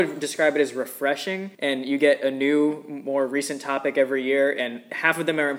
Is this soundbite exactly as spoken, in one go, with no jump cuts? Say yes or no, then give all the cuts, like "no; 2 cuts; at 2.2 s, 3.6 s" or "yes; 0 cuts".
no; 1 cut; at 1.5 s